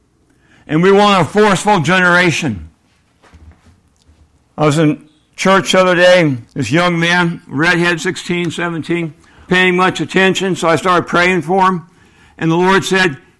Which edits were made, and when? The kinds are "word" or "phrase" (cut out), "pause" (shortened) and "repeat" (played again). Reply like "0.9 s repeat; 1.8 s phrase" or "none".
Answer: 6.5 s pause; 8.0 s phrase; 9.5 s word